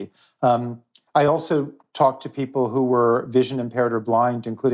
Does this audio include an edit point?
no; 0 cuts

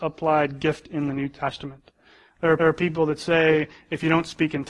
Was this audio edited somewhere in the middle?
yes; 1 cut; at 2.6 s

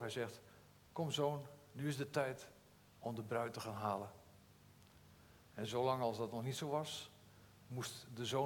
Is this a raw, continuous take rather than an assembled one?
yes; 0 cuts

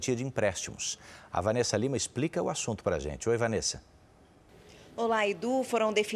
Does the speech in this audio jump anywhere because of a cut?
no; 0 cuts

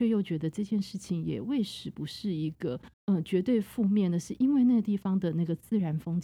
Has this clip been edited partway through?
yes; 1 cut; at 2.9 s

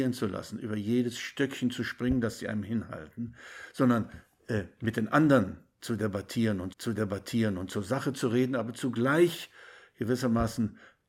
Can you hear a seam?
yes; 1 cut; at 6.7 s

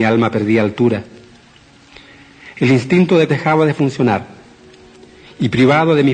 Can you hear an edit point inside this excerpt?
yes; 1 cut; at 3.3 s

